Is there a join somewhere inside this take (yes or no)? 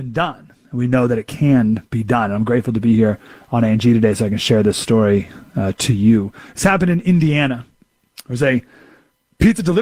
no